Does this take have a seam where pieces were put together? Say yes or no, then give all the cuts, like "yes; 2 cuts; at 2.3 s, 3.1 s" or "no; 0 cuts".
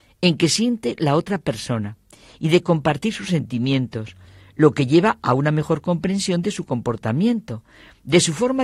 no; 0 cuts